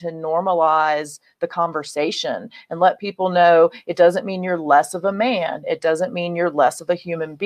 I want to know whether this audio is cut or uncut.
uncut